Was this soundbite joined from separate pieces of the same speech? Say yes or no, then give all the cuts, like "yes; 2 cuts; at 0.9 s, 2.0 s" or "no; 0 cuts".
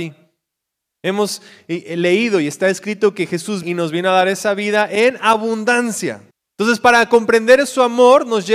yes; 2 cuts; at 3.6 s, 6.3 s